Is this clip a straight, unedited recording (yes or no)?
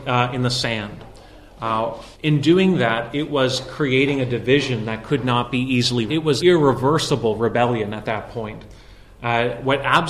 no